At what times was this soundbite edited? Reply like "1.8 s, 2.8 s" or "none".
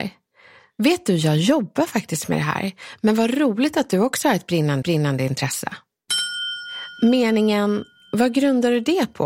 4.8 s